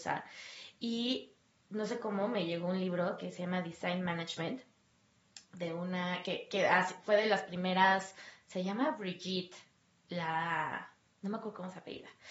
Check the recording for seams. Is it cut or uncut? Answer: uncut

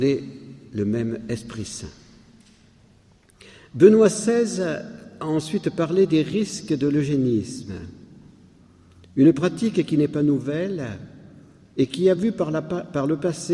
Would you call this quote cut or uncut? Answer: uncut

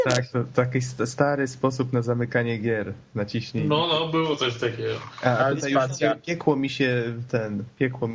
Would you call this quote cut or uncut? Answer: uncut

